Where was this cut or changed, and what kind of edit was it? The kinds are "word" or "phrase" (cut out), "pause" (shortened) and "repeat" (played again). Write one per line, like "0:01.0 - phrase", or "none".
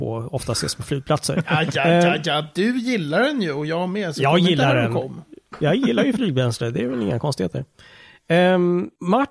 0:01.7 - word